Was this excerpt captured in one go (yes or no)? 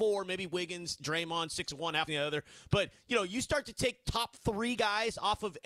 no